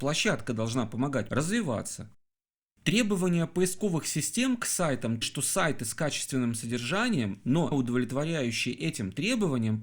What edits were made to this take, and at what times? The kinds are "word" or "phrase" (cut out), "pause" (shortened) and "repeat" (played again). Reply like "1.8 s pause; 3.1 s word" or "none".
1.3 s word; 5.2 s word; 7.7 s word